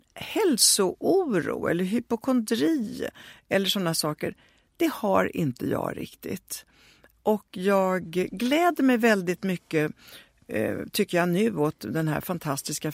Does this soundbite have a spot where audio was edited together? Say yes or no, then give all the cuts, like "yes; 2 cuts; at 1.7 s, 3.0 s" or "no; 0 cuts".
no; 0 cuts